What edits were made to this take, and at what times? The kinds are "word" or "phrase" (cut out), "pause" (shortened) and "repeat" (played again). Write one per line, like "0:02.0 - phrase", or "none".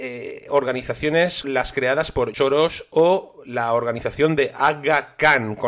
0:01.4 - word
0:02.3 - word